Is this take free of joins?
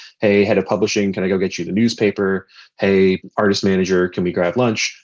yes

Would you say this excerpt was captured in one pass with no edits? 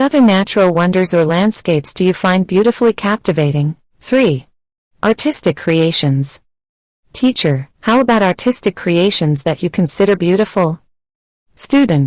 no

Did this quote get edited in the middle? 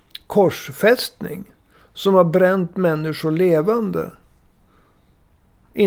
no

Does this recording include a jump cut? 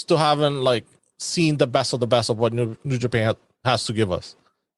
no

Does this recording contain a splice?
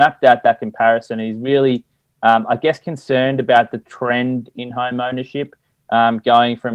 no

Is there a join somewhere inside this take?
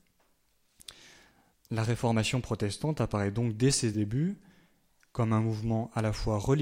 no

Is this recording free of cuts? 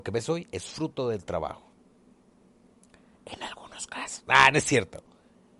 yes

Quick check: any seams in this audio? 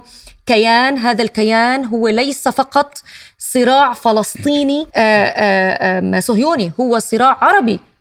yes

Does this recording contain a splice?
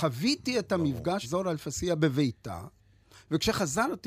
yes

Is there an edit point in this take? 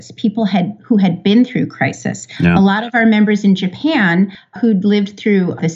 no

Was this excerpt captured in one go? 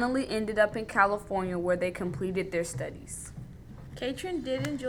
yes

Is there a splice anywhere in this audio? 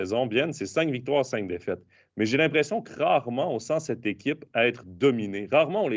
no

